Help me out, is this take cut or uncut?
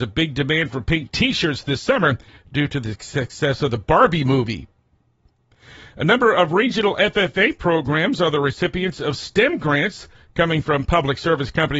uncut